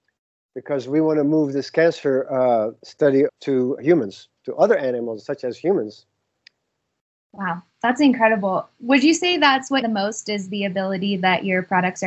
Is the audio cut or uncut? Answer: cut